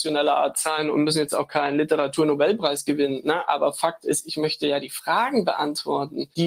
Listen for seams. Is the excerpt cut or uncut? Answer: uncut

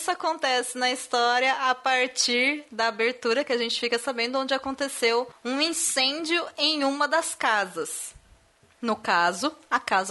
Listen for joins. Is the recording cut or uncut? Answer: uncut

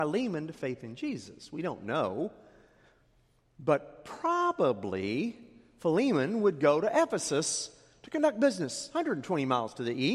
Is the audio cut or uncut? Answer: uncut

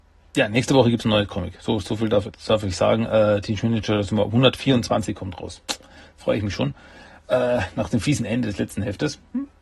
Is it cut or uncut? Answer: uncut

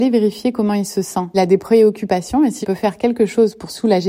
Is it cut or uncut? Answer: cut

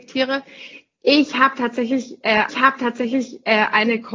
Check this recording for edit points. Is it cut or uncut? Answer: cut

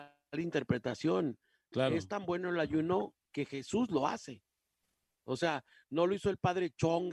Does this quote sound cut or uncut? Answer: uncut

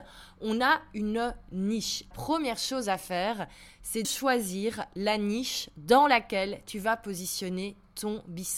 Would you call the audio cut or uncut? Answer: cut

